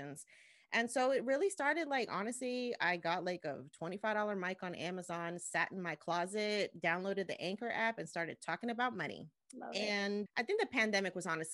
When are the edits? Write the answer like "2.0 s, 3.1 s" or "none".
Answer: 9.3 s, 10.3 s